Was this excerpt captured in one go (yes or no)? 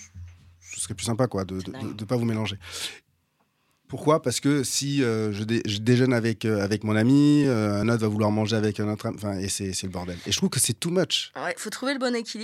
yes